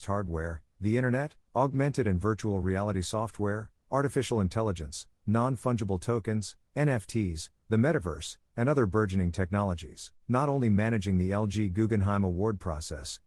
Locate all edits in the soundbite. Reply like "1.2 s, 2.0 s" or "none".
10.2 s